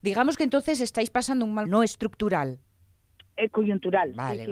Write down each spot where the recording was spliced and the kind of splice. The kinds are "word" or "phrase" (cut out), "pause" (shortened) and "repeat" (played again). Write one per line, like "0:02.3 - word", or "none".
0:01.6 - phrase